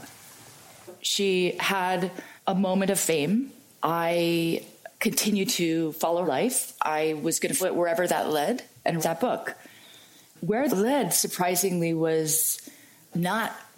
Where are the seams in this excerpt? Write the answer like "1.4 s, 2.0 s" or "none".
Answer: 2.4 s, 4.9 s, 6.2 s, 7.6 s, 9.0 s, 10.7 s